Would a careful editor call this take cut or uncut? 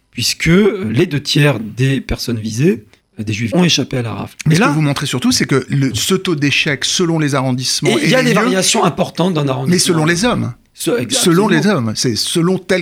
cut